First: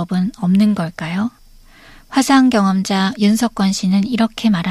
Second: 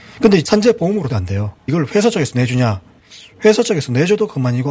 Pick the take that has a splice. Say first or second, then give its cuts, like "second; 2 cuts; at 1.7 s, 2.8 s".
second; 2 cuts; at 1.1 s, 1.6 s